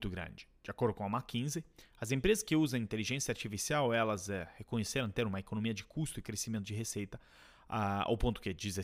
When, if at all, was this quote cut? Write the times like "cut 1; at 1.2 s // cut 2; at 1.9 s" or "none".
none